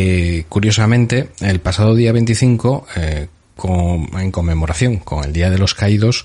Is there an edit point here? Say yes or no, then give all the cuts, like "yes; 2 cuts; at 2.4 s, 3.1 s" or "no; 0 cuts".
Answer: no; 0 cuts